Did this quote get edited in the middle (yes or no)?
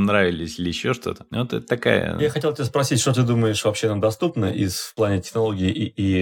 no